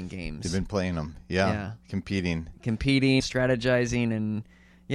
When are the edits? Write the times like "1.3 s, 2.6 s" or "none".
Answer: 3.2 s